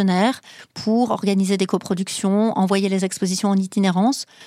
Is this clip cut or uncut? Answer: uncut